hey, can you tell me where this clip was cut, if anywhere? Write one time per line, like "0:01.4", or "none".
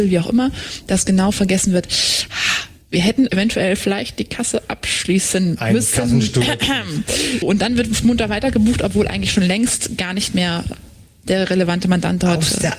0:03.3
0:07.4